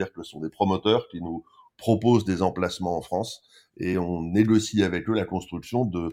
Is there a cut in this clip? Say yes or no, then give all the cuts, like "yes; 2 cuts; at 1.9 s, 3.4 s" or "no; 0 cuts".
no; 0 cuts